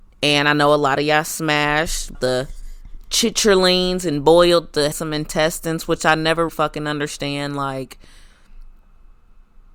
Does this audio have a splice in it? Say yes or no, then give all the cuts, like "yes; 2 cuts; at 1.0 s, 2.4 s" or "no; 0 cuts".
yes; 3 cuts; at 2.1 s, 4.9 s, 6.5 s